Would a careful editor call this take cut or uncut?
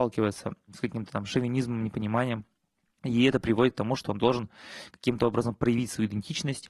uncut